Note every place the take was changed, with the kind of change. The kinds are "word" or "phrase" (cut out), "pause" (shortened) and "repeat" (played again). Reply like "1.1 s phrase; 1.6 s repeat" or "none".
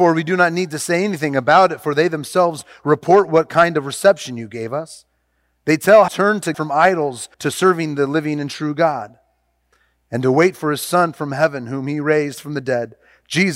6.1 s word; 6.5 s word; 7.3 s pause

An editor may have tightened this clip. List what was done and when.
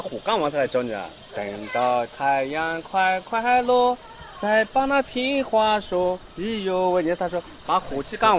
6.3 s pause

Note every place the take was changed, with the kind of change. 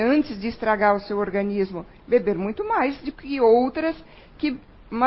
none

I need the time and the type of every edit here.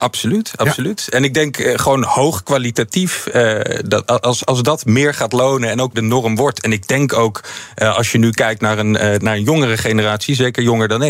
5.9 s word

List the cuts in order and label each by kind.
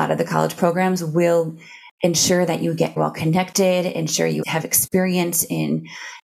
3.0 s word; 4.4 s word

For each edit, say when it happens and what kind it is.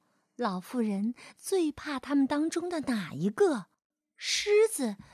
3.8 s pause

